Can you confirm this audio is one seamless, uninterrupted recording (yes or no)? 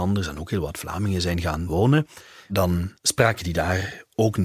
yes